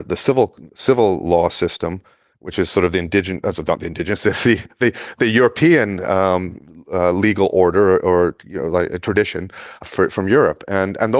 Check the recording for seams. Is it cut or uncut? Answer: uncut